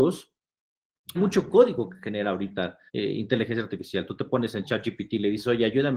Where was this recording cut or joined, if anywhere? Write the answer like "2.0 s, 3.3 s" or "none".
1.1 s, 2.9 s